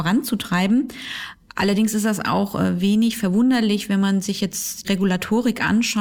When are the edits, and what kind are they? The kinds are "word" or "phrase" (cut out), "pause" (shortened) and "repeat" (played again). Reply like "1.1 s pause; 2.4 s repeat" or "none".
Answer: 4.8 s word

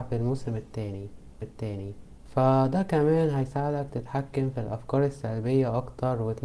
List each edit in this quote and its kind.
1.4 s repeat

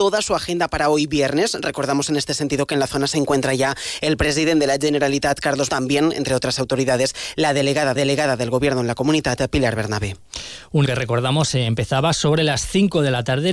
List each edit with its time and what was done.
5.7 s word; 8.0 s repeat; 10.9 s word

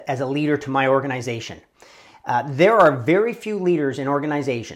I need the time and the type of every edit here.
none

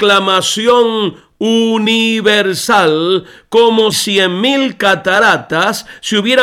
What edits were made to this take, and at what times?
3.9 s word

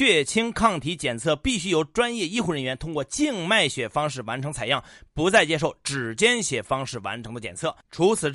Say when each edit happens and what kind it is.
none

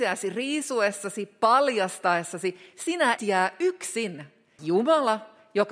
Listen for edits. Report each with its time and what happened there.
3.2 s word; 4.6 s word

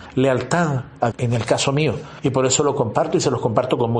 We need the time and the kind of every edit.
1.1 s word

